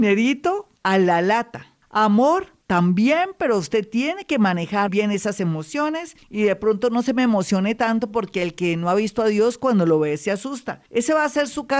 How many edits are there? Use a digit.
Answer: 1